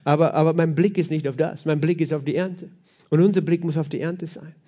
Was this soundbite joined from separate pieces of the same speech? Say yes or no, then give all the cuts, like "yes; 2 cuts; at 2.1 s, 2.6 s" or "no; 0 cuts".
no; 0 cuts